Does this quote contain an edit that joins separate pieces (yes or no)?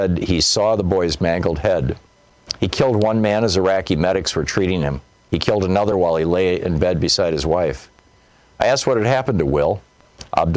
no